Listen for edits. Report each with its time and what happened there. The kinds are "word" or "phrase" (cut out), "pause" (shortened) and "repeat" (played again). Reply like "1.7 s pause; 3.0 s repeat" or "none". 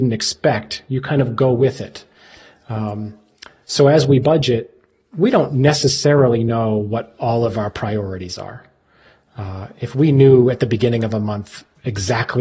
none